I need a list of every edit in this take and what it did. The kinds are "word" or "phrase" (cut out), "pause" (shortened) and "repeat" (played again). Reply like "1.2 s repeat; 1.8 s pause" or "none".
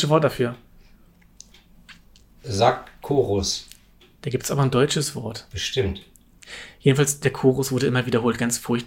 4.0 s pause